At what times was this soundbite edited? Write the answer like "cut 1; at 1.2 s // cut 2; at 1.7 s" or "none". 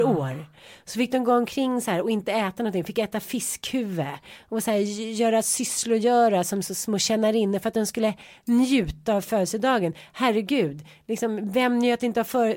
none